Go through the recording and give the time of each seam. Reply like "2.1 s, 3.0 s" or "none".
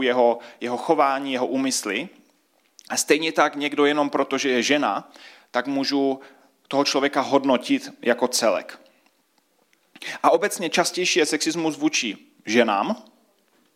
none